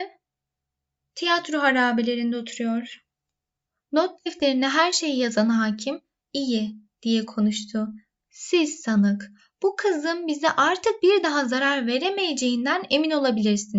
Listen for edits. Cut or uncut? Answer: uncut